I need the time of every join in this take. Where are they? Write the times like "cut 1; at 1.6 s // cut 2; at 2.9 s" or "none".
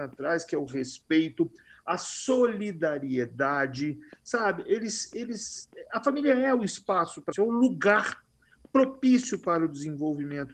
cut 1; at 7.3 s